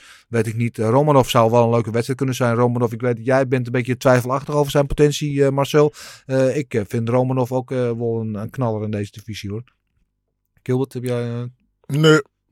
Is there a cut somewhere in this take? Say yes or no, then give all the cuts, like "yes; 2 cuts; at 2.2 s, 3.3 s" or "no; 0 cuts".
no; 0 cuts